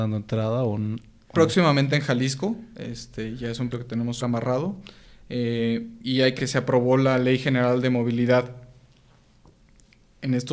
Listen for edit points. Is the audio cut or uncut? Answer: cut